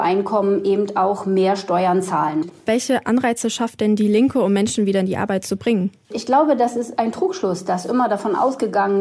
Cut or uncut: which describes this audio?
cut